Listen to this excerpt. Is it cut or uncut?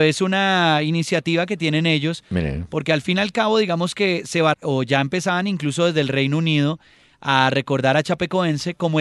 cut